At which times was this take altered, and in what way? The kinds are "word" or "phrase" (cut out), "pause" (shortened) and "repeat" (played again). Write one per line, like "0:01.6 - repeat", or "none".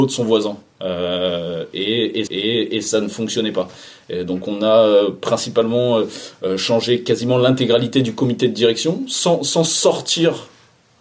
0:02.3 - repeat